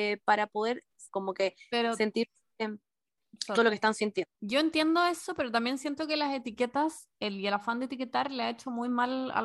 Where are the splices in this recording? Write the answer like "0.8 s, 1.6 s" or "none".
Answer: 1.1 s, 3.6 s, 4.3 s